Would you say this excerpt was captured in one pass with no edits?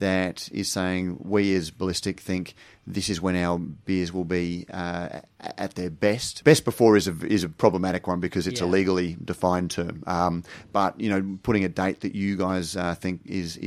yes; 0 cuts

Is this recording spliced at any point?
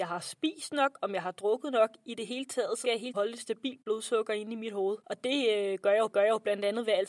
yes; 4 cuts; at 2.8 s, 3.1 s, 5.0 s, 6.1 s

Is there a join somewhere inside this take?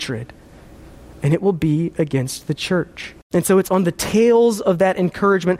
yes; 1 cut; at 3.2 s

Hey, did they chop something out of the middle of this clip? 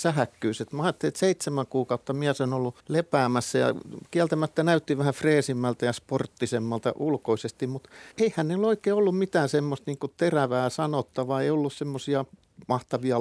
yes; 2 cuts; at 2.8 s, 8.1 s

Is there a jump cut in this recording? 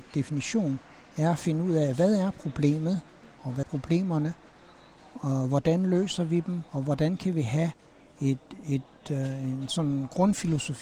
yes; 2 cuts; at 3.6 s, 6.7 s

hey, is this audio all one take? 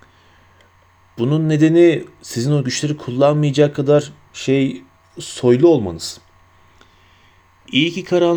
yes; 0 cuts

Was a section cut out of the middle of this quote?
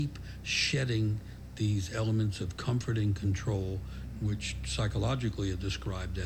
no; 0 cuts

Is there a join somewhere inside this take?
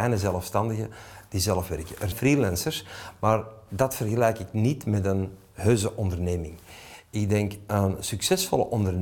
yes; 1 cut; at 2.1 s

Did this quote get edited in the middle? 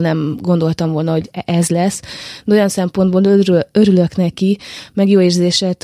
no; 0 cuts

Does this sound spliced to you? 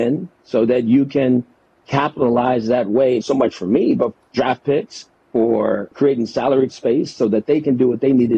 yes; 4 cuts; at 3.2 s, 4.1 s, 5.9 s, 6.7 s

